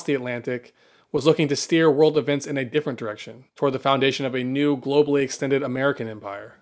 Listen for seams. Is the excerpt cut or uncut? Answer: cut